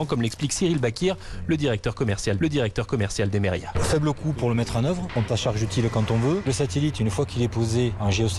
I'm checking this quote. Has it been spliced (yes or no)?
yes